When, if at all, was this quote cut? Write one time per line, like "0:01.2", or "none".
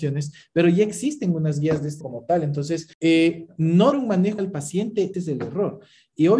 0:02.0
0:02.9
0:03.9
0:04.4
0:05.1